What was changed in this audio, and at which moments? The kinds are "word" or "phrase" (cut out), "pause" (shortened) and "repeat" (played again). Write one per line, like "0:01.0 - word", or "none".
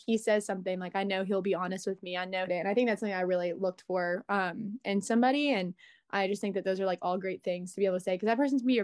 0:02.5 - phrase

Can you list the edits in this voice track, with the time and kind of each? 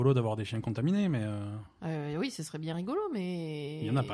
none

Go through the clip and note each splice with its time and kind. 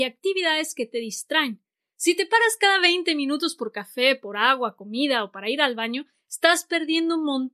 none

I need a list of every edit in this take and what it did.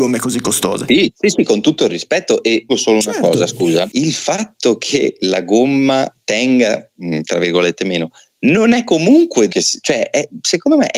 0:01.1 - word
0:02.7 - word
0:09.5 - word

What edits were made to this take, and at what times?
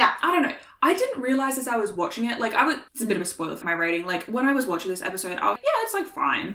0:02.9 - pause
0:03.6 - word
0:05.6 - word

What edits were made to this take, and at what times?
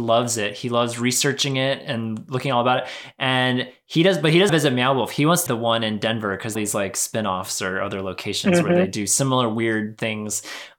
0:04.5 - phrase
0:05.5 - word
0:06.5 - phrase

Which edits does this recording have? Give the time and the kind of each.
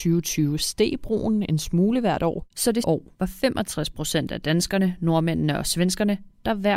0:02.5 - pause
0:02.8 - word

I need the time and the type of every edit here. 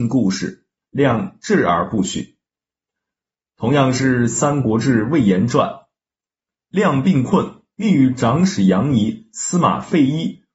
0:06.6 - word

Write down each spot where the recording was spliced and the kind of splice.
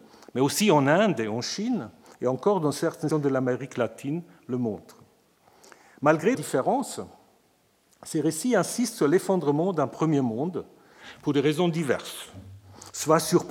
0:03.1 - word
0:06.3 - word

